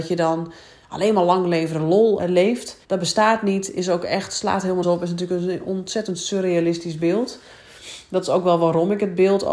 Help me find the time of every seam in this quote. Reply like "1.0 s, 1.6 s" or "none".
2.2 s, 2.8 s, 4.8 s